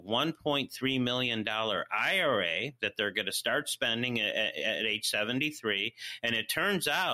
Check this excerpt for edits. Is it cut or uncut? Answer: uncut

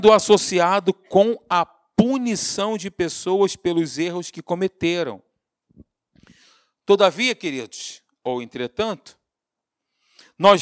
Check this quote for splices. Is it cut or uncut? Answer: uncut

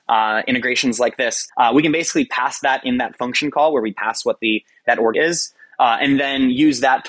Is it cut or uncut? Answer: cut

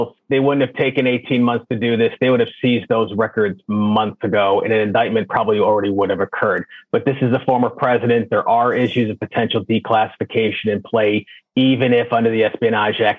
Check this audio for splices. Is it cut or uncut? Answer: uncut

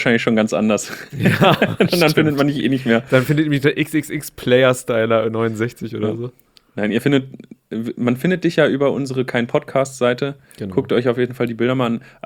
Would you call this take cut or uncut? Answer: uncut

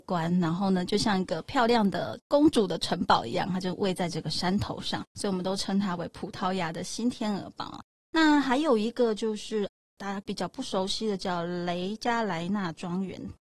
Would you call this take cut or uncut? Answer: uncut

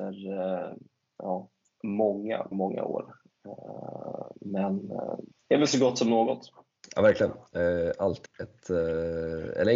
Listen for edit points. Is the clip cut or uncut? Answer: cut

